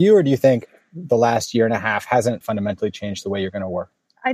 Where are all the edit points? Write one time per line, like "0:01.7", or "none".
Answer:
0:02.4

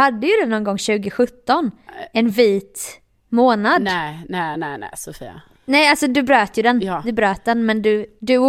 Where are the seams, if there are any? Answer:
none

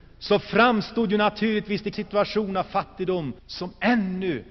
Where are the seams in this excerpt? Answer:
0:01.9
0:03.4

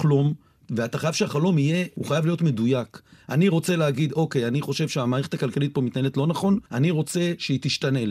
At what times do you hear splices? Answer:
0:06.7

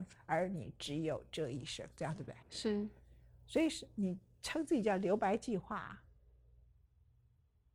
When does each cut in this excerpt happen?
0:02.4

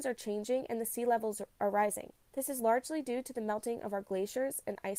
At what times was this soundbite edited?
0:01.5
0:02.2

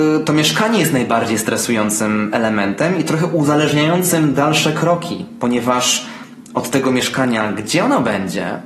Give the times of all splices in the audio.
none

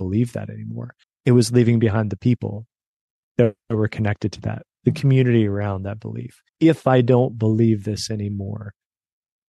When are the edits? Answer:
0:01.0
0:03.6
0:06.5

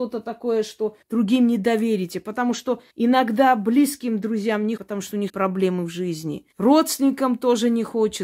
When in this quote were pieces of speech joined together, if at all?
0:01.0
0:02.9
0:04.8
0:05.3
0:06.5

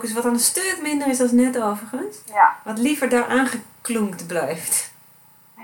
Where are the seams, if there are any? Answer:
0:02.2

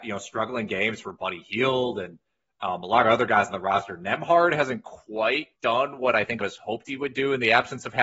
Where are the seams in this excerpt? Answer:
0:01.0
0:05.5
0:06.4

